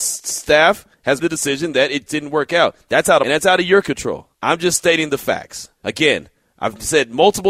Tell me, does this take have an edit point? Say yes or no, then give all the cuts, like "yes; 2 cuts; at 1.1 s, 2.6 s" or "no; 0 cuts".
yes; 5 cuts; at 1.2 s, 2.1 s, 3.2 s, 4.3 s, 5.8 s